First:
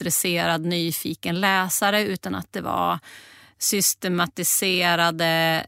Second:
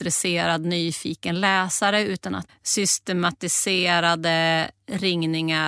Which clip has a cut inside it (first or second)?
second